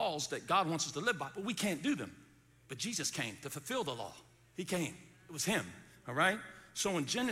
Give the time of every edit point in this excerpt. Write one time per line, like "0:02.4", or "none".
none